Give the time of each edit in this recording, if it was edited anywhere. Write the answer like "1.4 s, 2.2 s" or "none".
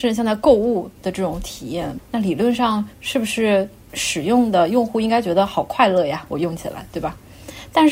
2.9 s